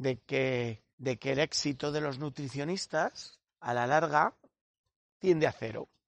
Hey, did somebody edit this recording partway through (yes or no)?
yes